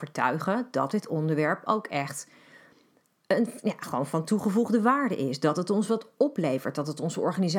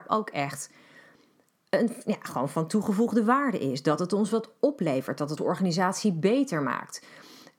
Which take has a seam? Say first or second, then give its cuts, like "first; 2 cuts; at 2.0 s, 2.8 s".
second; 1 cut; at 5.4 s